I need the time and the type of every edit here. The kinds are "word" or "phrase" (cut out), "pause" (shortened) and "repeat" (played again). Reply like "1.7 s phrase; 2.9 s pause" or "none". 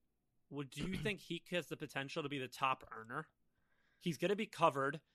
none